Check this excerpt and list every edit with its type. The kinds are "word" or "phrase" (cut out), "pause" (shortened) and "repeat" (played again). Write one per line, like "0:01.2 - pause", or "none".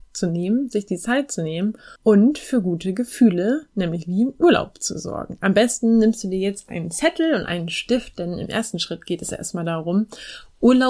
0:02.0 - pause